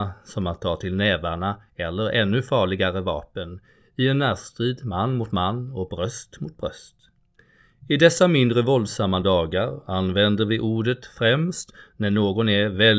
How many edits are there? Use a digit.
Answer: 0